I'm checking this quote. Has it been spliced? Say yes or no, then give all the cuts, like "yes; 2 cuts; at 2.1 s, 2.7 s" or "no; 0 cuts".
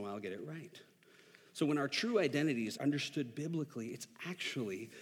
yes; 1 cut; at 2.8 s